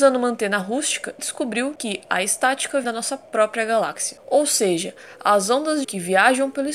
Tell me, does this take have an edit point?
yes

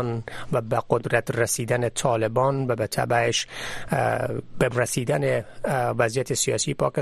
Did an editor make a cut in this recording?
yes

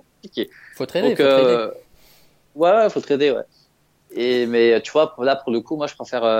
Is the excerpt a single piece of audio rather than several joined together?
yes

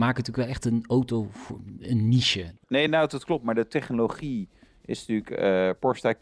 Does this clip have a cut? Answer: no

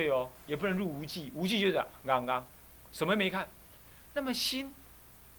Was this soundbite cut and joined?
no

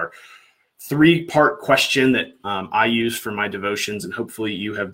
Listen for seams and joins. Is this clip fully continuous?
yes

